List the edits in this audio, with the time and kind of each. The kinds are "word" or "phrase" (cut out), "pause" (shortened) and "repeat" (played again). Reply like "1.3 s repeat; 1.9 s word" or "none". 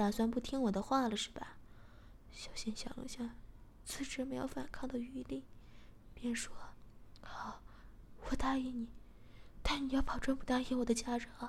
none